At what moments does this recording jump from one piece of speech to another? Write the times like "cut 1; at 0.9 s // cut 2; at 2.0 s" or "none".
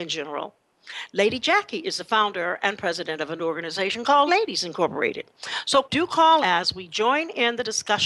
cut 1; at 3.4 s // cut 2; at 4.3 s // cut 3; at 5.8 s // cut 4; at 6.4 s